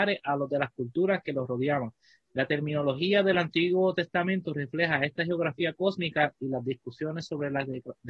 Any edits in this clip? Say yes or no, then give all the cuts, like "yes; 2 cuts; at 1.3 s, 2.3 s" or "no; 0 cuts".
no; 0 cuts